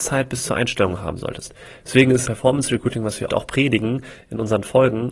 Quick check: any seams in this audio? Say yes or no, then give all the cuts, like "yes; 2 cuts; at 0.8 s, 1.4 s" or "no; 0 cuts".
yes; 2 cuts; at 2.2 s, 3.3 s